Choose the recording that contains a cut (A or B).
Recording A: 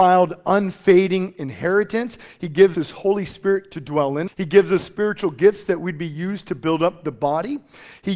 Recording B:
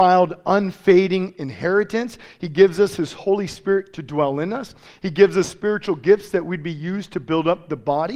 A